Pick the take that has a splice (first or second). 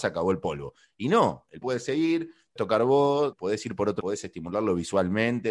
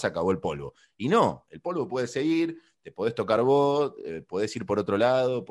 first